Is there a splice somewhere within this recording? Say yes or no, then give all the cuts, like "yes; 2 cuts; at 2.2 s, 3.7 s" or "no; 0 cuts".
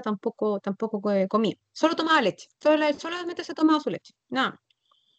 yes; 1 cut; at 2.5 s